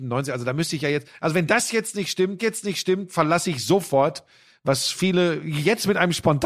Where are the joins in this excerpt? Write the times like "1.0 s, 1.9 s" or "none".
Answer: 2.4 s